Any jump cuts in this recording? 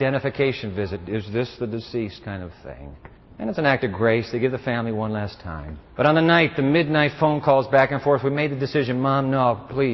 yes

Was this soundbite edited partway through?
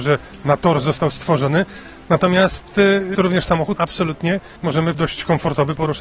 yes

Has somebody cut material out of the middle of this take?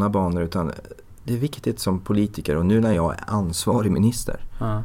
no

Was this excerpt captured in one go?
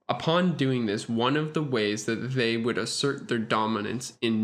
yes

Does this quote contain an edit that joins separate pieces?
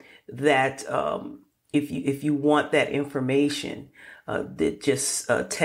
no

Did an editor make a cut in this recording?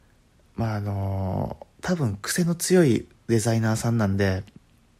yes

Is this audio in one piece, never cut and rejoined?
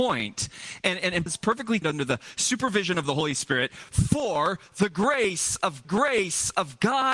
no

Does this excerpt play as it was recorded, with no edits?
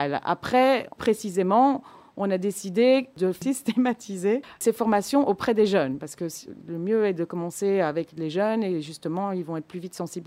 no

